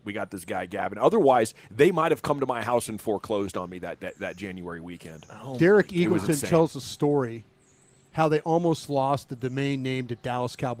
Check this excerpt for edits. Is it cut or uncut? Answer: uncut